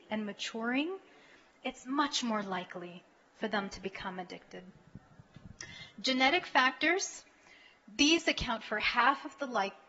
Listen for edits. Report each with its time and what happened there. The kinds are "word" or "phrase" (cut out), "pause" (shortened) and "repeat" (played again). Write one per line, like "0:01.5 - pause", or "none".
none